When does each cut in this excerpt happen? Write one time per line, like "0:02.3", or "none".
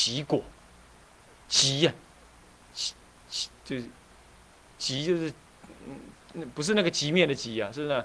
0:03.0